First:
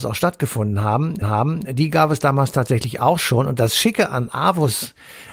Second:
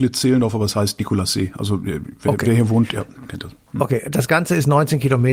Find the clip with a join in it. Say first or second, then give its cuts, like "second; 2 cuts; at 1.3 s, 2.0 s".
first; 1 cut; at 1.2 s